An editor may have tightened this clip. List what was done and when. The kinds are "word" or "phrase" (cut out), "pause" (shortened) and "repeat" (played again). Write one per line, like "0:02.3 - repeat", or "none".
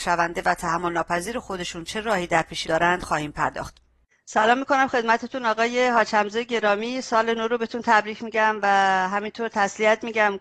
0:02.6 - word